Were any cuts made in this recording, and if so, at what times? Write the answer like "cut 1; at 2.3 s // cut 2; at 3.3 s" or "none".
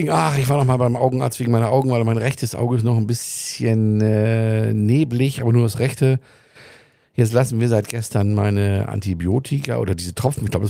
none